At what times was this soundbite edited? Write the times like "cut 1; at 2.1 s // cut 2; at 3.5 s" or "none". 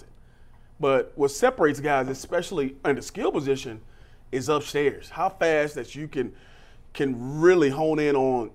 none